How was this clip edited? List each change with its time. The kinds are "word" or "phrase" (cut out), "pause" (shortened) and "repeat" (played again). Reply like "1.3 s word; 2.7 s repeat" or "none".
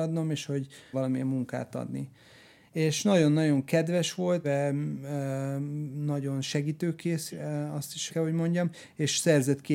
0.9 s word; 4.4 s word; 7.3 s word; 8.1 s word